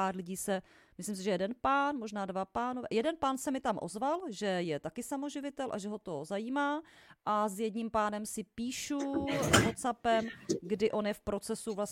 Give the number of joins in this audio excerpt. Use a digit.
0